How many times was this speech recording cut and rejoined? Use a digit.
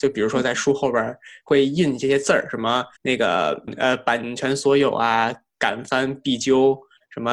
1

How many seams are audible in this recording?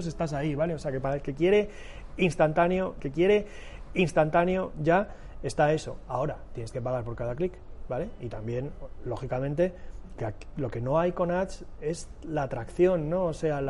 2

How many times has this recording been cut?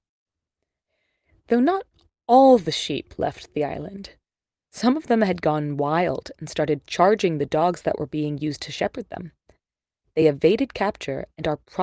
0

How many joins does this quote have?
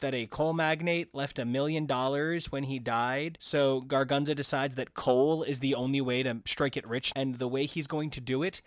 1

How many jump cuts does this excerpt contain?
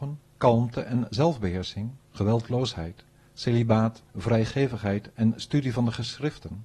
2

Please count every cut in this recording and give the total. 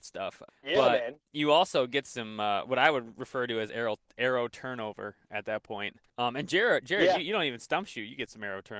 0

